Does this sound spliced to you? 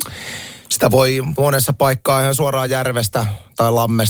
no; 0 cuts

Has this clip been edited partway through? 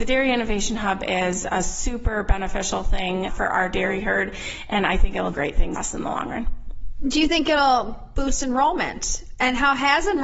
yes; 3 cuts; at 3.3 s, 5.3 s, 5.7 s

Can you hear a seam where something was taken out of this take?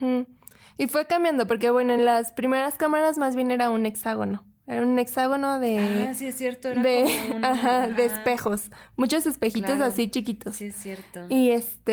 no; 0 cuts

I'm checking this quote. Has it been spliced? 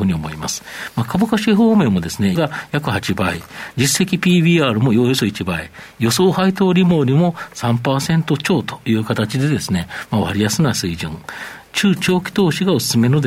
yes; 1 cut; at 2.3 s

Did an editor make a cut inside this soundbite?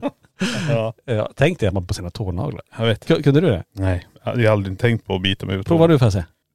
yes; 2 cuts; at 1.9 s, 4.1 s

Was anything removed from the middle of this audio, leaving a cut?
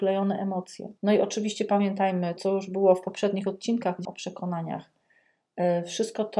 yes; 3 cuts; at 1.0 s, 2.4 s, 4.0 s

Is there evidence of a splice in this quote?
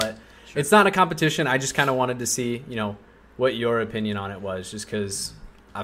no; 0 cuts

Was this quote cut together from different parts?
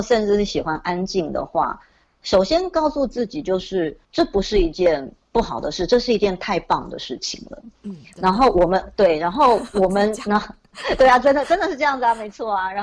yes; 1 cut; at 4.0 s

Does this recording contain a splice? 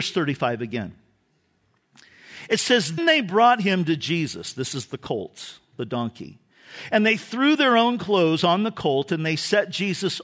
yes; 1 cut; at 3.0 s

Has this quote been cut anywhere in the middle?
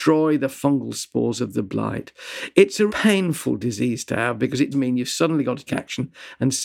yes; 3 cuts; at 2.9 s, 4.7 s, 5.7 s

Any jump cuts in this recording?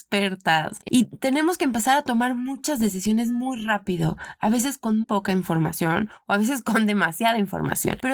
yes; 1 cut; at 5.0 s

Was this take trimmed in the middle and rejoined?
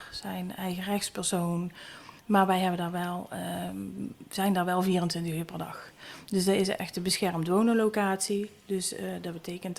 yes; 1 cut; at 2.2 s

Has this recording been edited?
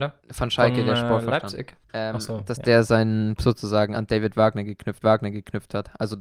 yes; 3 cuts; at 1.8 s, 3.4 s, 5.0 s

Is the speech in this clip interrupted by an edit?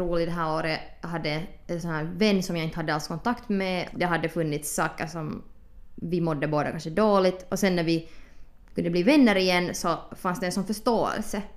no; 0 cuts

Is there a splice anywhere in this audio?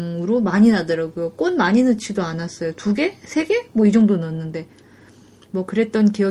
no; 0 cuts

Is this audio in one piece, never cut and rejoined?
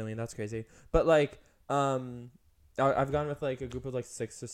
yes; 0 cuts

